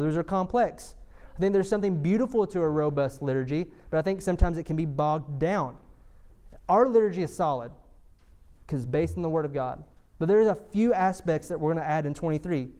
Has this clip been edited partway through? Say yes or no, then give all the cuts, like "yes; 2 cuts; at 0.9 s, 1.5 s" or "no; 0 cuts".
no; 0 cuts